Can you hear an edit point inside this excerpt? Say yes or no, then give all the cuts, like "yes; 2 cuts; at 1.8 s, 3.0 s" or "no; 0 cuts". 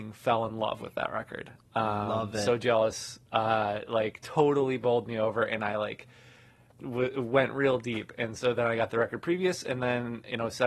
yes; 1 cut; at 6.7 s